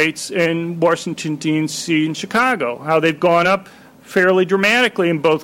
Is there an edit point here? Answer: no; 0 cuts

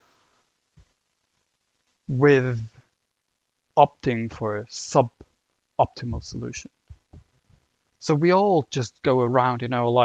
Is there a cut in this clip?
no; 0 cuts

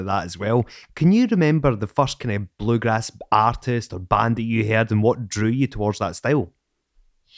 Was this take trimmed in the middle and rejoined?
no; 0 cuts

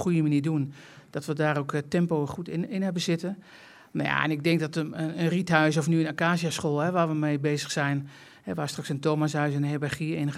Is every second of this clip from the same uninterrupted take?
yes; 0 cuts

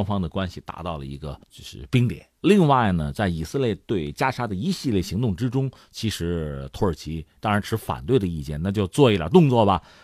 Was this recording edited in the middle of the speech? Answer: yes; 2 cuts; at 1.4 s, 2.4 s

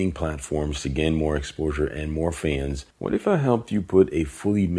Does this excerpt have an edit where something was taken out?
yes; 1 cut; at 2.9 s

